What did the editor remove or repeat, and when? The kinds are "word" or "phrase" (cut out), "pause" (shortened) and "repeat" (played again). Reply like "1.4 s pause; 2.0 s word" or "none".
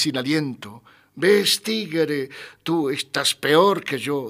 none